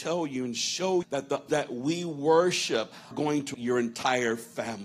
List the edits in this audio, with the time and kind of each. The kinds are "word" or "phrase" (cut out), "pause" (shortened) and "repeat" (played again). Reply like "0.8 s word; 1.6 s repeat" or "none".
1.0 s word; 1.5 s word; 3.1 s word; 3.5 s word